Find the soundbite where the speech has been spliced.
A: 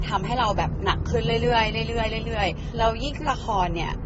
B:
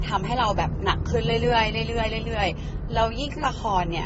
A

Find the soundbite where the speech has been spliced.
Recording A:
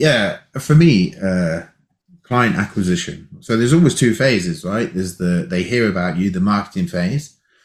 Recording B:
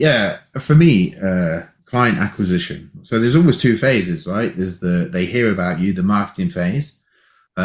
B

